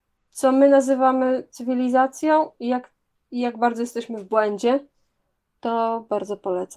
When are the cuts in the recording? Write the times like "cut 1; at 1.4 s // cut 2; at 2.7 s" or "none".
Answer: cut 1; at 3.1 s